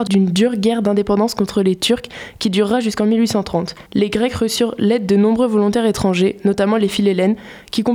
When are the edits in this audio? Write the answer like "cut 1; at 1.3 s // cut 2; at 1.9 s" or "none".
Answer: cut 1; at 3.8 s